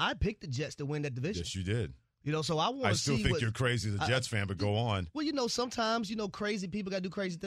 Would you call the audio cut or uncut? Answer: uncut